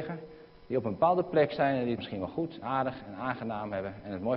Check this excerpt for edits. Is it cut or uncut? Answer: cut